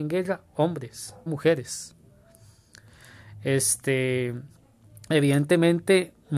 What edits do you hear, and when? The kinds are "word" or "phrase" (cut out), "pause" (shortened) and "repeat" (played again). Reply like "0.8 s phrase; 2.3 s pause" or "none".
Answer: 1.3 s word